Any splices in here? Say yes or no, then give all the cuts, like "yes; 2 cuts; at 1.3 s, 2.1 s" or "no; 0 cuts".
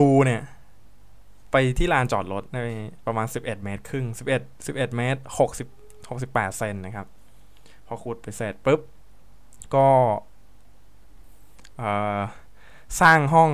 no; 0 cuts